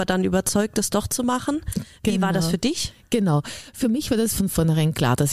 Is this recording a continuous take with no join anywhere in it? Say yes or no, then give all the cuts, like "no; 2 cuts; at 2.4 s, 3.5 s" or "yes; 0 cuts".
yes; 0 cuts